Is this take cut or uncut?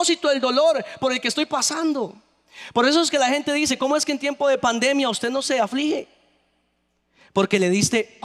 uncut